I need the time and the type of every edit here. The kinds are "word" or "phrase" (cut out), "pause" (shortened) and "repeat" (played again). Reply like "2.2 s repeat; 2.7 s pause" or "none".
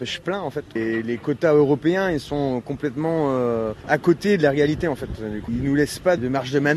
none

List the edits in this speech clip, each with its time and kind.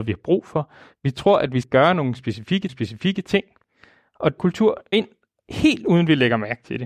1.6 s word; 2.7 s repeat; 4.4 s phrase; 4.9 s word

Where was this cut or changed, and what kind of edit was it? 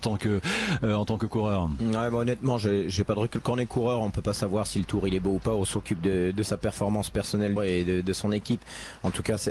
7.6 s phrase

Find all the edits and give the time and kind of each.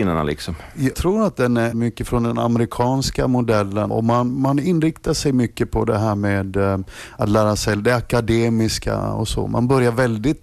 0.9 s word; 1.7 s word; 3.9 s word

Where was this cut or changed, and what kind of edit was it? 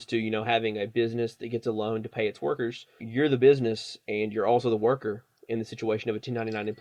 3.0 s word

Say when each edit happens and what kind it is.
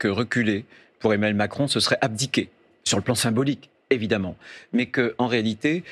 none

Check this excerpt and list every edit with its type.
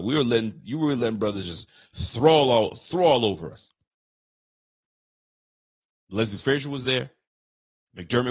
none

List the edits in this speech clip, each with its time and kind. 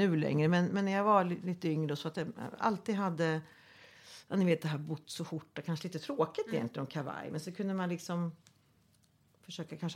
none

